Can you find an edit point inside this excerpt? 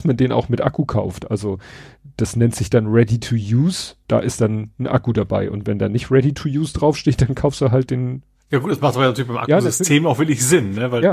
yes; 2 cuts; at 4.0 s, 8.3 s

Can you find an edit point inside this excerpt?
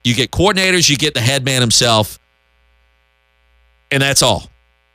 no; 0 cuts

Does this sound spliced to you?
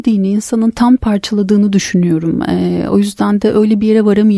yes; 1 cut; at 1.0 s

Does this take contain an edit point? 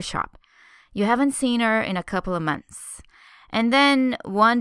no; 0 cuts

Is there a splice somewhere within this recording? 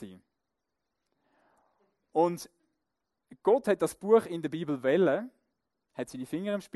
no; 0 cuts

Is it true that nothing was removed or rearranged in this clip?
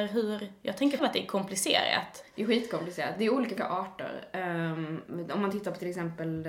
no; 2 cuts; at 1.0 s, 3.6 s

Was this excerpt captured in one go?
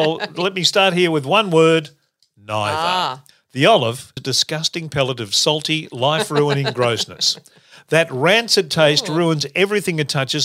no; 2 cuts; at 3.3 s, 4.2 s

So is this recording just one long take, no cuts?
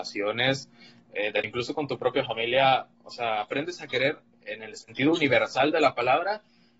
no; 1 cut; at 1.4 s

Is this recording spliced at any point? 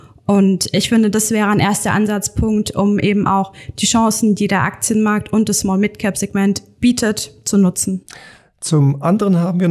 no; 0 cuts

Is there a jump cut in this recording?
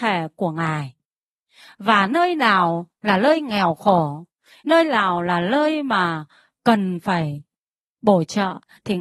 no; 0 cuts

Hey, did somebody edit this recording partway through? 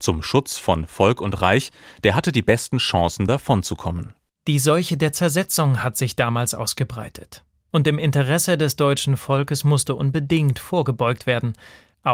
no; 0 cuts

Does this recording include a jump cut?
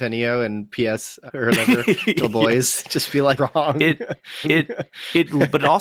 yes; 4 cuts; at 1.3 s, 2.2 s, 3.4 s, 4.4 s

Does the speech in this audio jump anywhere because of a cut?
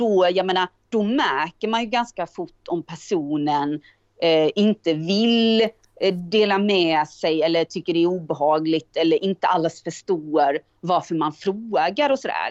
no; 0 cuts

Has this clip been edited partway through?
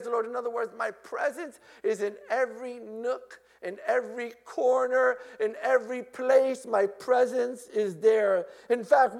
no; 0 cuts

